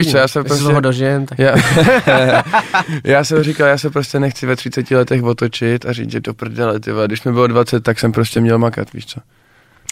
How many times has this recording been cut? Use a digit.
0